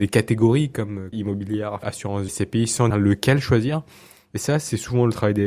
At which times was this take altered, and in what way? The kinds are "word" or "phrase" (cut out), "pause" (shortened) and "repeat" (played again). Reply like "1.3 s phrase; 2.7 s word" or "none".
1.1 s word; 1.8 s word; 2.3 s word; 2.9 s word